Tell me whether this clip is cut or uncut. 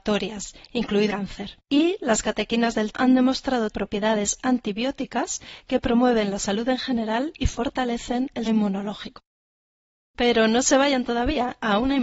cut